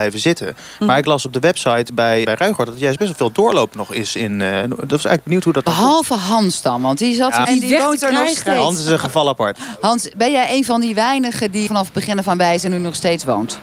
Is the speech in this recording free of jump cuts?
no; 3 cuts; at 2.2 s, 7.4 s, 11.7 s

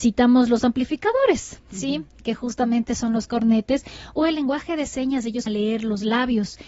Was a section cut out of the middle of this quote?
yes; 1 cut; at 5.5 s

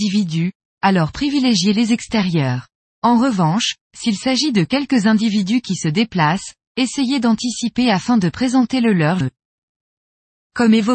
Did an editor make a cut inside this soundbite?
yes; 2 cuts; at 2.8 s, 9.2 s

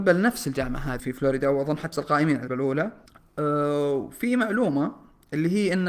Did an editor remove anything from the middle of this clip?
yes; 4 cuts; at 1.0 s, 1.9 s, 2.5 s, 3.1 s

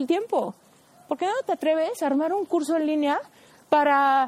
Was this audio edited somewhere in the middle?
no; 0 cuts

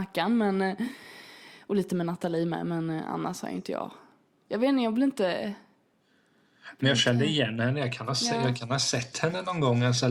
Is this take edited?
no; 0 cuts

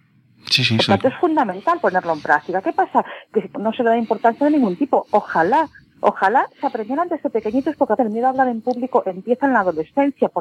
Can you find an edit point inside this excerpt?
yes; 2 cuts; at 3.5 s, 8.0 s

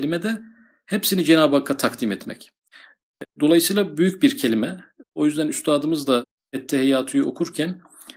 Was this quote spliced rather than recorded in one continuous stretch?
no; 0 cuts

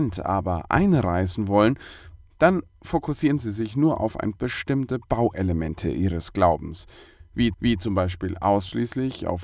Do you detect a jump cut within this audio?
yes; 2 cuts; at 4.3 s, 7.5 s

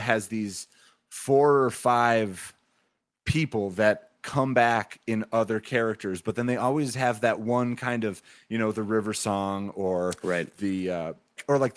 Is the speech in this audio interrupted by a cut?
no; 0 cuts

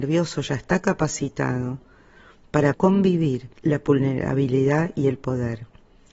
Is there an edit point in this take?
yes; 2 cuts; at 2.7 s, 3.5 s

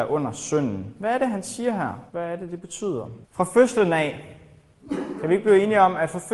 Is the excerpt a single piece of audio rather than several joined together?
no; 2 cuts; at 2.1 s, 3.2 s

